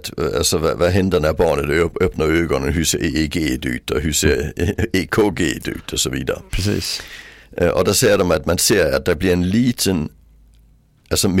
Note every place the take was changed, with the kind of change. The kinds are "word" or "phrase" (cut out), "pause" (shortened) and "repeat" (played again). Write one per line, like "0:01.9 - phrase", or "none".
none